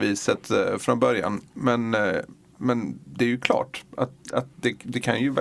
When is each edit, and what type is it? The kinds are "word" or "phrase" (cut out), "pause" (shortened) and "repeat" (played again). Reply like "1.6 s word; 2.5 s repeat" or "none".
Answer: 3.0 s pause; 4.2 s pause